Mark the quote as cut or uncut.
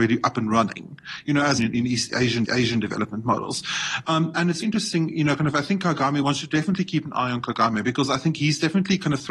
cut